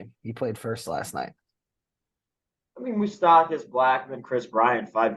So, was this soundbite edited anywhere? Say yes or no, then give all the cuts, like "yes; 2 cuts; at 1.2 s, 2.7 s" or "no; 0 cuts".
no; 0 cuts